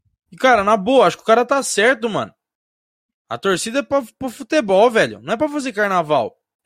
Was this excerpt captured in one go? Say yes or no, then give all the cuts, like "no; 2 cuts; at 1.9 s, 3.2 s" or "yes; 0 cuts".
yes; 0 cuts